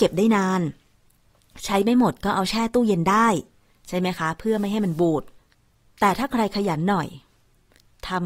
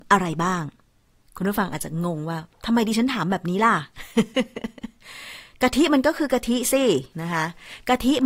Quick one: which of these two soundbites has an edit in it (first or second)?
second